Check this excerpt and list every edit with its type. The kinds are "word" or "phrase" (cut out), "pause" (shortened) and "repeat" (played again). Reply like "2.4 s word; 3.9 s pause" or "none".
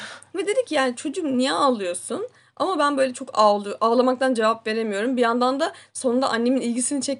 none